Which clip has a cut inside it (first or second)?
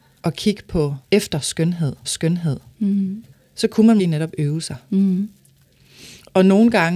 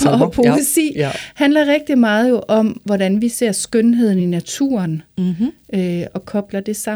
first